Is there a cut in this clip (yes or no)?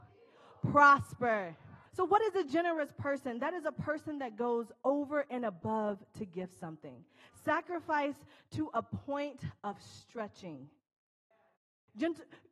yes